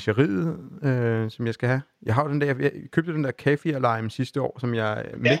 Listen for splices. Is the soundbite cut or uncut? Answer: uncut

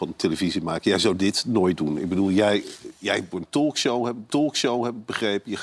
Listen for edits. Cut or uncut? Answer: cut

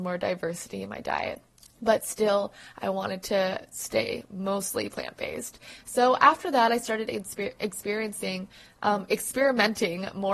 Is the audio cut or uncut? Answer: uncut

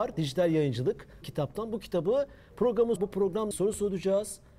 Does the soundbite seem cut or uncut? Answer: cut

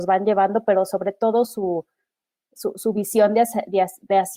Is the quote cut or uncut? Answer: uncut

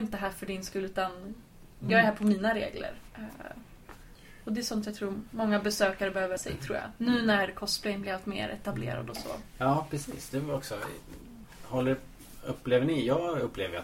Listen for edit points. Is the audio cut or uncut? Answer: cut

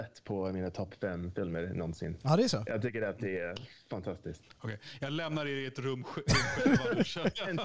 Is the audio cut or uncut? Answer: uncut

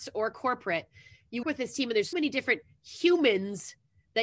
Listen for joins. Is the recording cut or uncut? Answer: cut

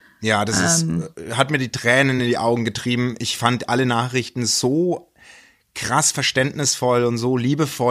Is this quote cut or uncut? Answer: uncut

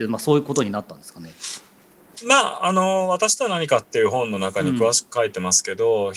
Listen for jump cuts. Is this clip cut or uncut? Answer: uncut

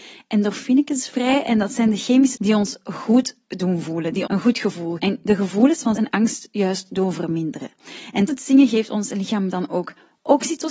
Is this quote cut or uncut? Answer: cut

